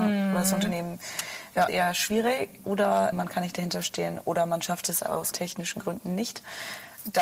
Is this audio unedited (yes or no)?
no